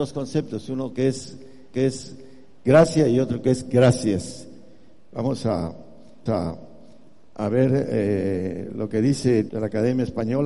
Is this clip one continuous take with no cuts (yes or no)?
no